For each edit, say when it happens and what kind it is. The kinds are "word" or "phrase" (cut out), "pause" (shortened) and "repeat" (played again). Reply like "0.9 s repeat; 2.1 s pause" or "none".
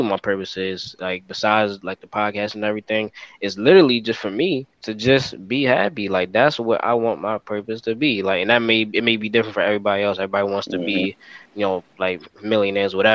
4.7 s pause; 11.5 s pause